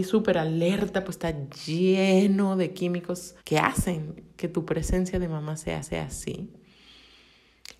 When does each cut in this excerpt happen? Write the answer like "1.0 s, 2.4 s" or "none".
1.1 s, 3.4 s, 5.8 s

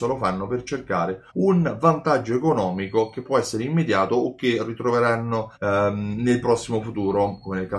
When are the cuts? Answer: 1.3 s, 5.5 s

